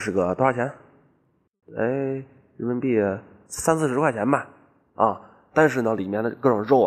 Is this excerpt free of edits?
yes; 0 cuts

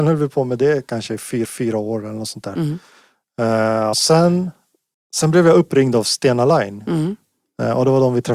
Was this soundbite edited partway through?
yes; 3 cuts; at 1.4 s, 3.9 s, 4.9 s

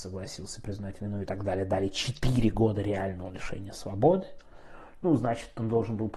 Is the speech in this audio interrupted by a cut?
no; 0 cuts

